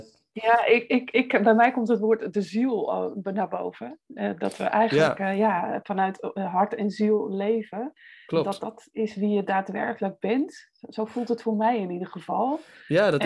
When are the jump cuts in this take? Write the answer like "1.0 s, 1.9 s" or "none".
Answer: none